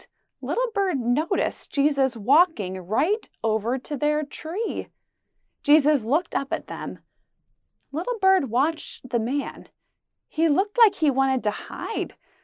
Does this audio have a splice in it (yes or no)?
no